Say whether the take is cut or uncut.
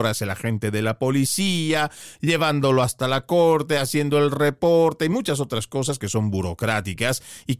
uncut